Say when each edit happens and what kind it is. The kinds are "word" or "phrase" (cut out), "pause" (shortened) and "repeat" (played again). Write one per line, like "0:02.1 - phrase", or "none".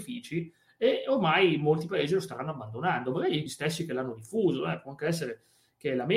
0:03.5 - word